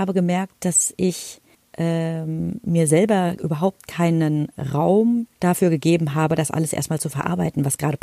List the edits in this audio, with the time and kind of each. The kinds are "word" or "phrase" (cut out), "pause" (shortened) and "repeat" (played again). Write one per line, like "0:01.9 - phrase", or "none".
0:01.5 - pause
0:05.3 - pause